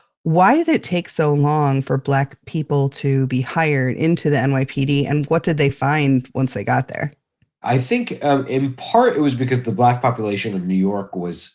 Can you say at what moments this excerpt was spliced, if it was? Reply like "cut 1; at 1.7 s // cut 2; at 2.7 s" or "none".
none

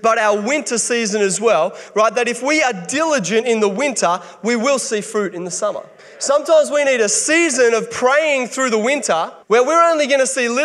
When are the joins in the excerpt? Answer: cut 1; at 6.0 s // cut 2; at 9.4 s

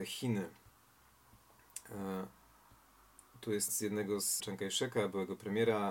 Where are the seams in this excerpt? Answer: cut 1; at 3.7 s // cut 2; at 4.4 s

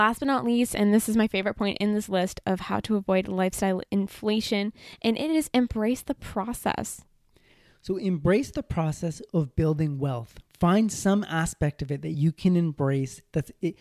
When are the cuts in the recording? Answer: none

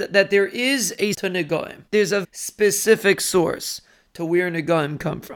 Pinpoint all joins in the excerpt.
cut 1; at 1.1 s // cut 2; at 1.9 s // cut 3; at 2.2 s

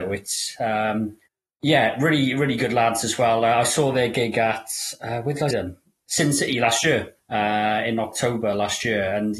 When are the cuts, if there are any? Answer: cut 1; at 1.3 s // cut 2; at 5.5 s

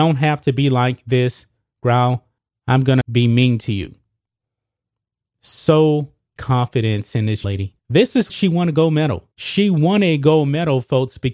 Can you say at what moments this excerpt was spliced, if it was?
cut 1; at 2.4 s // cut 2; at 3.0 s // cut 3; at 6.4 s // cut 4; at 7.4 s // cut 5; at 7.8 s // cut 6; at 8.3 s // cut 7; at 9.3 s

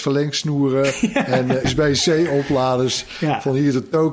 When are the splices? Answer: cut 1; at 1.6 s

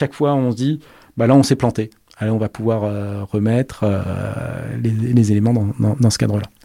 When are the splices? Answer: none

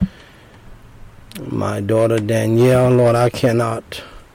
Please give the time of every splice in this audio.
none

